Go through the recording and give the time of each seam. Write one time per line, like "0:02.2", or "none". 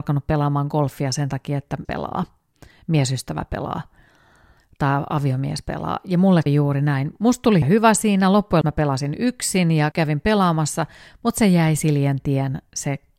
0:01.8
0:06.5
0:07.6
0:08.6
0:09.9
0:11.8